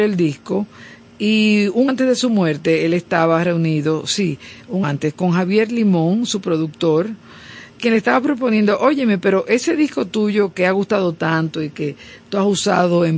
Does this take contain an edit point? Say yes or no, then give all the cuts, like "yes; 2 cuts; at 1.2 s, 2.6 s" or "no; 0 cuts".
yes; 3 cuts; at 1.9 s, 4.8 s, 7.8 s